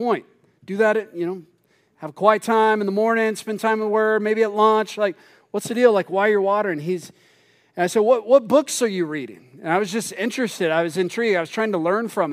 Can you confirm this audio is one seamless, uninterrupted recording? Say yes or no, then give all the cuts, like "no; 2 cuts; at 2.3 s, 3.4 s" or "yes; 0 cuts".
yes; 0 cuts